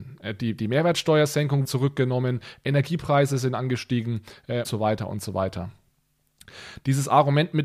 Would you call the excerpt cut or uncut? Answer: cut